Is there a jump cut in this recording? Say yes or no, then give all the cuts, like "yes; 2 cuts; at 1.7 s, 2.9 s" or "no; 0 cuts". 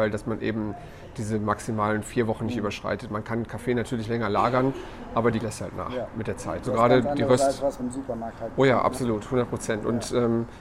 yes; 3 cuts; at 5.4 s, 6.6 s, 7.8 s